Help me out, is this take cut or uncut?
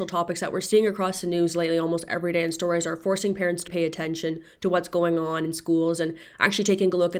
cut